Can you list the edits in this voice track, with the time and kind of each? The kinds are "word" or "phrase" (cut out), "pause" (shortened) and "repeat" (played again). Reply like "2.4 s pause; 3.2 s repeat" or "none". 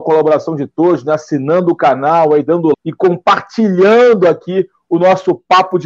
2.7 s word